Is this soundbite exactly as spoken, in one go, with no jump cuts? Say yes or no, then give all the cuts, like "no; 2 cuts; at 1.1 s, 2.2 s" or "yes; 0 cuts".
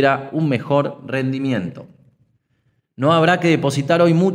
yes; 0 cuts